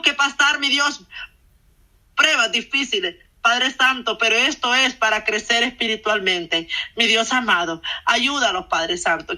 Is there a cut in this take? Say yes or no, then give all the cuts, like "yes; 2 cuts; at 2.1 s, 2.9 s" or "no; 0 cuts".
no; 0 cuts